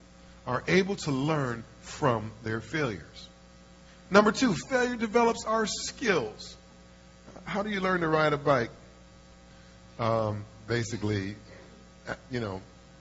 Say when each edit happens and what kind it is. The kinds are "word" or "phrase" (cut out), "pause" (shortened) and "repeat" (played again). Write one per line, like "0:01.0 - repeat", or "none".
none

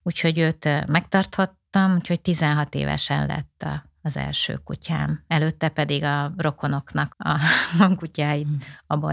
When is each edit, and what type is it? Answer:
0:07.1 - word

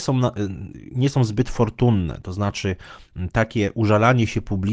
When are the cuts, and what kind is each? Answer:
none

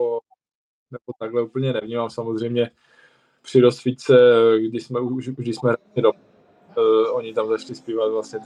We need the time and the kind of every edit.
0:05.9 - pause

